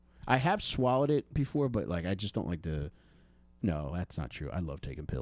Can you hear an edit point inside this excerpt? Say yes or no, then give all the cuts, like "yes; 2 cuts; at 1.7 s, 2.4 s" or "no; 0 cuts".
no; 0 cuts